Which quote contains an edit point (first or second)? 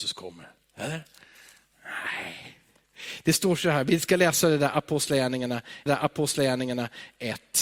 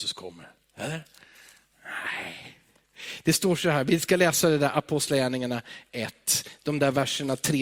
first